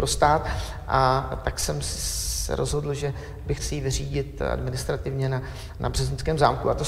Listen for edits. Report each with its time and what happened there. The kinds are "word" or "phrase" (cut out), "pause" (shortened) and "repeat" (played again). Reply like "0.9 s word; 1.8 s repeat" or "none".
3.5 s word